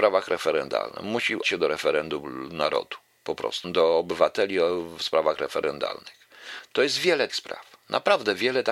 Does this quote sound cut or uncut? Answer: cut